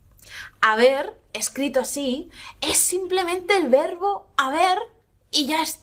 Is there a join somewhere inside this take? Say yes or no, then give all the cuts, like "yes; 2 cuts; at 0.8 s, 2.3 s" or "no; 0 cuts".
no; 0 cuts